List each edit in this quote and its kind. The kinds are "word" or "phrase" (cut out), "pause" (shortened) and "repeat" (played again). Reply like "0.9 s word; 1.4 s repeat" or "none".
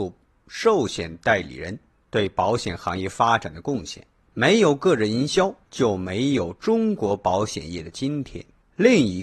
5.6 s pause